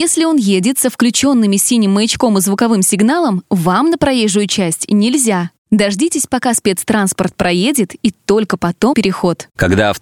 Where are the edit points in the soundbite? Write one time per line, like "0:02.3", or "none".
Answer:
0:05.6
0:08.9